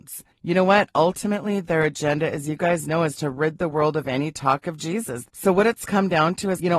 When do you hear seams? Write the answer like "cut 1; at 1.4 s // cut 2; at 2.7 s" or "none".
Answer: none